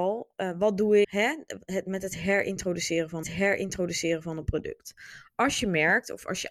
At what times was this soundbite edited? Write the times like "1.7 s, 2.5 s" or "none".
1.0 s, 3.2 s